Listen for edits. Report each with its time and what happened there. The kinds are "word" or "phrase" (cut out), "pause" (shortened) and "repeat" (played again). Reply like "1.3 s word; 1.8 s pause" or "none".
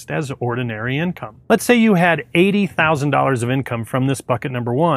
1.4 s pause